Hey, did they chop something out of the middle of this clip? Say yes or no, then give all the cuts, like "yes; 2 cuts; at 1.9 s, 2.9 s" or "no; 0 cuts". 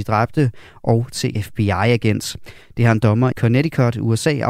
yes; 2 cuts; at 1.3 s, 3.3 s